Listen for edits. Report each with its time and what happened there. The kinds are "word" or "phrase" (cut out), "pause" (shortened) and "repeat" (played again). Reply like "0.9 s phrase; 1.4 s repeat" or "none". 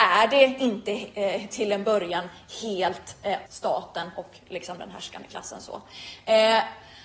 3.5 s word